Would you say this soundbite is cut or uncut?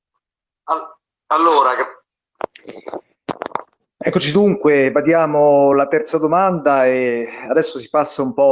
uncut